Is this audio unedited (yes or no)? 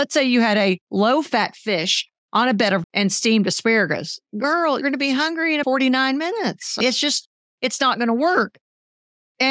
no